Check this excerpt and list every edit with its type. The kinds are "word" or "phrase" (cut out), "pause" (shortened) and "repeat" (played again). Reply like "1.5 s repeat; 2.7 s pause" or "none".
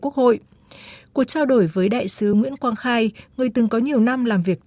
none